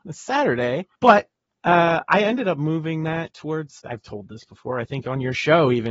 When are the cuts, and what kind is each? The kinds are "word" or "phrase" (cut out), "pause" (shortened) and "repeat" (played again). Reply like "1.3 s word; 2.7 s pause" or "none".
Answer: 0.9 s pause; 3.8 s word